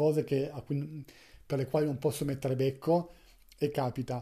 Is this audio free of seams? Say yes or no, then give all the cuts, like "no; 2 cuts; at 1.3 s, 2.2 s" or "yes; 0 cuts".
yes; 0 cuts